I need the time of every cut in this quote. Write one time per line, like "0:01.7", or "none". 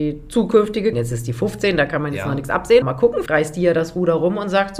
0:00.9
0:02.8
0:03.3